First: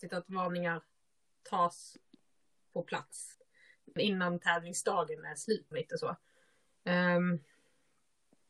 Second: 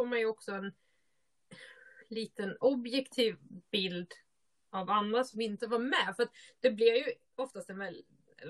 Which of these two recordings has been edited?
first; 1 cut; at 5.7 s

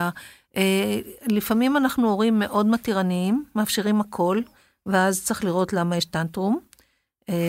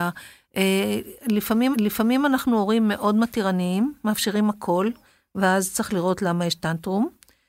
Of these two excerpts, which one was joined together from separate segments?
second; 1 cut; at 1.7 s

